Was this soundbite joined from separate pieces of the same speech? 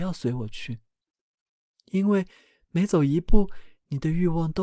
no; 0 cuts

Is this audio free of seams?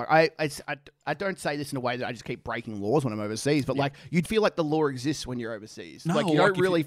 no; 1 cut; at 4.2 s

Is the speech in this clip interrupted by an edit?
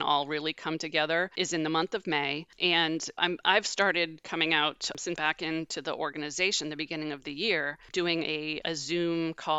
yes; 2 cuts; at 3.2 s, 5.2 s

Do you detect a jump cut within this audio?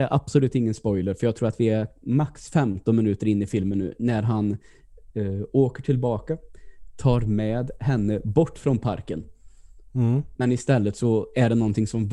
no; 0 cuts

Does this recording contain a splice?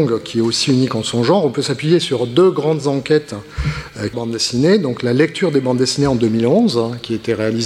yes; 1 cut; at 4.1 s

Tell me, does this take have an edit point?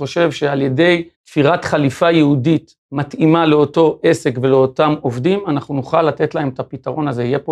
yes; 2 cuts; at 1.1 s, 2.8 s

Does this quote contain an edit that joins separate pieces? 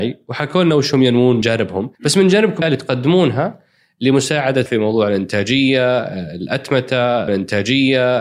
yes; 5 cuts; at 1.4 s, 1.9 s, 2.6 s, 4.7 s, 7.3 s

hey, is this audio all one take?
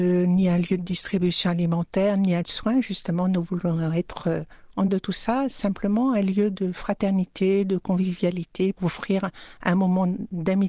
no; 3 cuts; at 2.4 s, 4.9 s, 8.8 s

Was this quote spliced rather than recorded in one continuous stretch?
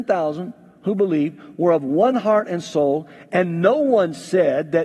no; 0 cuts

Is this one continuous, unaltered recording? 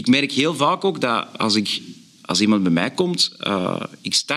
yes; 0 cuts

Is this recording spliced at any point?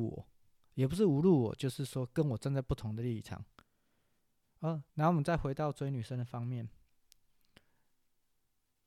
yes; 1 cut; at 4.9 s

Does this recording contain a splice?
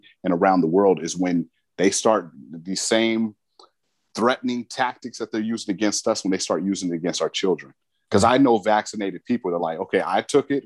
no; 0 cuts

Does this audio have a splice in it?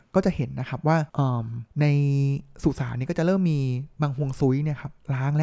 yes; 2 cuts; at 1.1 s, 1.7 s

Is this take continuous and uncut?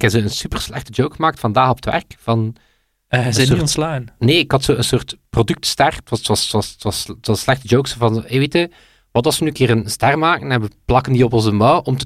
yes; 0 cuts

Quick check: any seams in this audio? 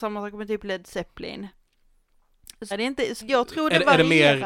yes; 2 cuts; at 2.7 s, 3.2 s

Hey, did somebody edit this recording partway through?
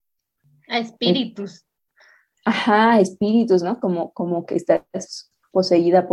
no; 0 cuts

